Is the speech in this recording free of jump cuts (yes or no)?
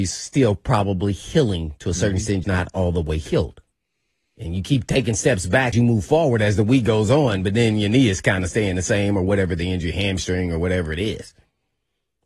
no